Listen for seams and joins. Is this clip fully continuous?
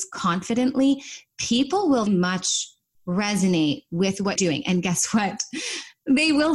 no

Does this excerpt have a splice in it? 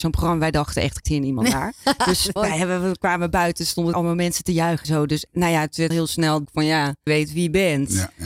yes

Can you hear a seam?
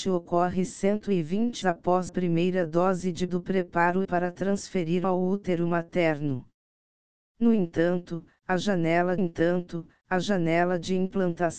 yes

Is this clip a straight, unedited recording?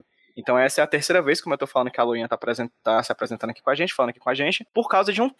yes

